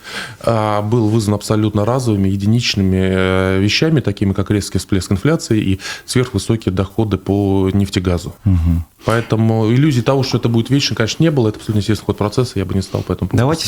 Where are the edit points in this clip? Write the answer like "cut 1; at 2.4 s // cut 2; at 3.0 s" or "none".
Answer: cut 1; at 8.4 s